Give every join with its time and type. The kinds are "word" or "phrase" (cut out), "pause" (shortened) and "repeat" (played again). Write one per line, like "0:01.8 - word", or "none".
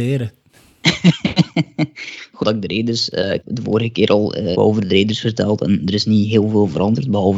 0:02.4 - word
0:03.4 - word
0:04.5 - word